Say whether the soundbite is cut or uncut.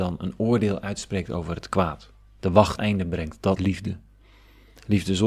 cut